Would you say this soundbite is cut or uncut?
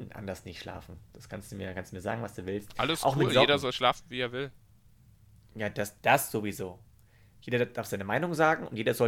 uncut